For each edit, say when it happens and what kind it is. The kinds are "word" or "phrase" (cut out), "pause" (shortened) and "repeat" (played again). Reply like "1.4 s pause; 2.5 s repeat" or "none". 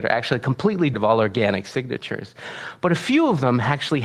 0.9 s word